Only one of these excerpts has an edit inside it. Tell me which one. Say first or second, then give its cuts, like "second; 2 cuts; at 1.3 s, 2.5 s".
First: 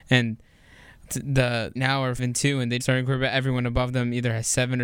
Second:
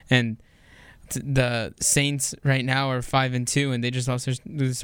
first; 3 cuts; at 1.8 s, 2.2 s, 2.8 s